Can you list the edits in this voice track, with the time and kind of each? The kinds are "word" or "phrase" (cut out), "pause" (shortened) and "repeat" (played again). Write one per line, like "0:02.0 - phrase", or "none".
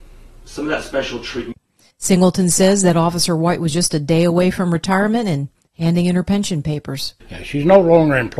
none